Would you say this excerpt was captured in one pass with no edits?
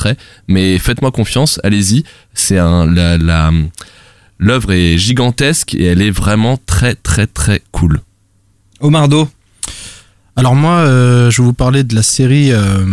yes; 0 cuts

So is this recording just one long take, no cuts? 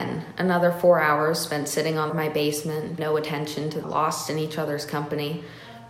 no; 3 cuts; at 2.1 s, 3.0 s, 3.8 s

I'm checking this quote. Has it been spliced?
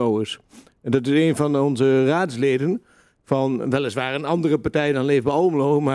no; 0 cuts

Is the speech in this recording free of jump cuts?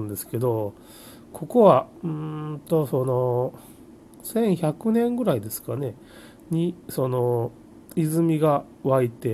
yes; 0 cuts

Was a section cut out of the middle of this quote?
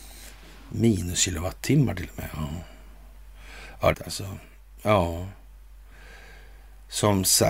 yes; 1 cut; at 3.9 s

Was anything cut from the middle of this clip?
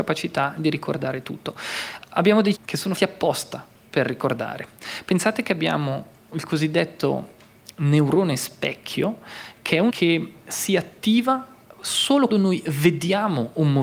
yes; 4 cuts; at 2.5 s, 3.0 s, 9.9 s, 12.3 s

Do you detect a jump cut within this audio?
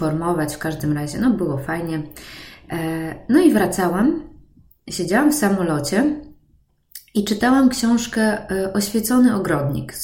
no; 0 cuts

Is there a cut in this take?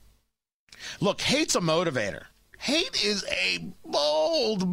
no; 0 cuts

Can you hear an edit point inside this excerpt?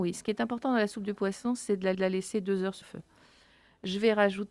yes; 2 cuts; at 1.9 s, 2.8 s

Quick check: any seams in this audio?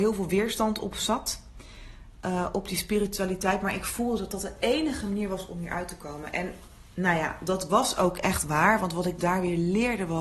no; 0 cuts

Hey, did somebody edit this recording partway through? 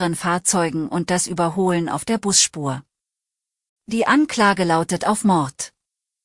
no; 0 cuts

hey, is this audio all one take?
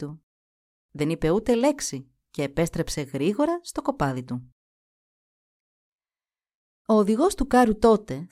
yes; 0 cuts

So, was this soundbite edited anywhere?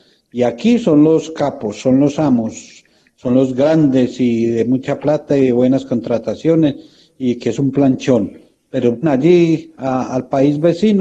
yes; 1 cut; at 9.0 s

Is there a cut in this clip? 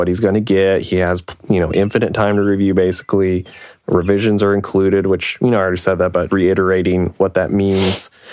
yes; 1 cut; at 6.3 s

